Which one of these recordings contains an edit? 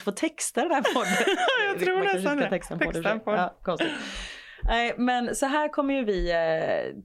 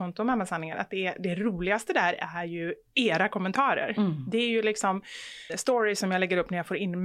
second; 1 cut; at 5.5 s

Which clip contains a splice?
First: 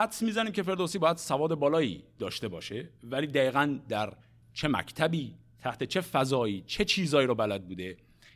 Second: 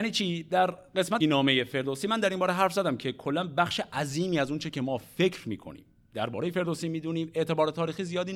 second; 1 cut; at 1.2 s

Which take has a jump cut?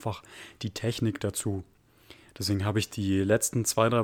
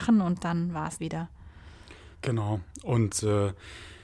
second; 2 cuts; at 1.0 s, 2.1 s

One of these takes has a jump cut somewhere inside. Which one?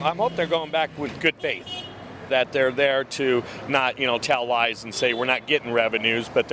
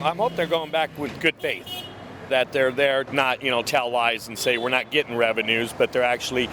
second; 1 cut; at 3.1 s

